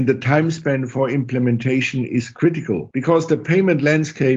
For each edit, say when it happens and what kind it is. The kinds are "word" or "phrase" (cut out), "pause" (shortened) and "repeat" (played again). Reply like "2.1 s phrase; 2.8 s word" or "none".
none